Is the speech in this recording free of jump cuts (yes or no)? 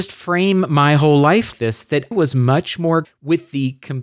no